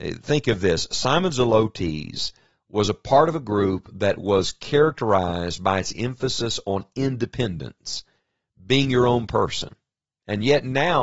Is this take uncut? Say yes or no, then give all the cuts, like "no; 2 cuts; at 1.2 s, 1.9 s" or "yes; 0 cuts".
yes; 0 cuts